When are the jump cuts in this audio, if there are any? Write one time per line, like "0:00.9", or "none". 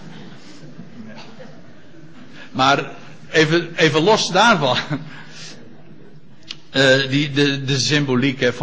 none